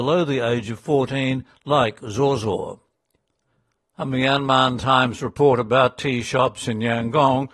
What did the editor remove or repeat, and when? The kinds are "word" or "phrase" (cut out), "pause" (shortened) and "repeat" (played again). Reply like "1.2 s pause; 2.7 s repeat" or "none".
none